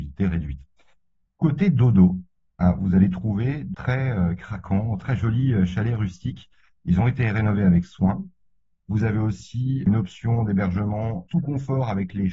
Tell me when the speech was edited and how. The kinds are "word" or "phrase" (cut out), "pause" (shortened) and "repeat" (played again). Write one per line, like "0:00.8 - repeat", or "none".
0:03.7 - word